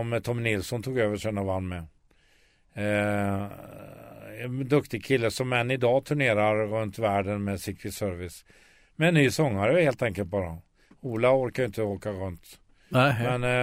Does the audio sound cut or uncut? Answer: uncut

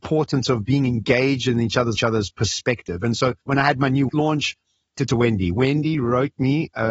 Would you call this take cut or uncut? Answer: cut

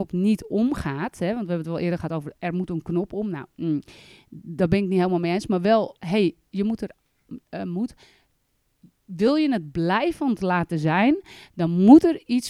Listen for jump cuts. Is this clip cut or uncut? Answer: cut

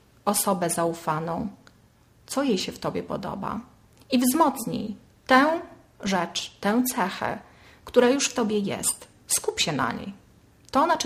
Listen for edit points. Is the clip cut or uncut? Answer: uncut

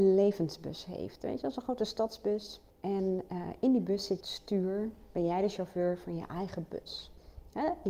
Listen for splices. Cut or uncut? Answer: cut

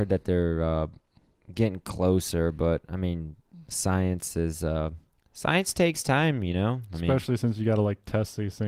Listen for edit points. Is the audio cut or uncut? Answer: uncut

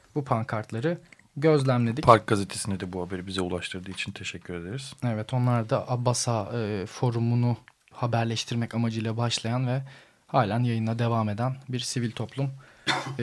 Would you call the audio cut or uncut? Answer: cut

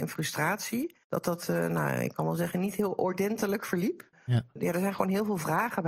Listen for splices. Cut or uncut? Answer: cut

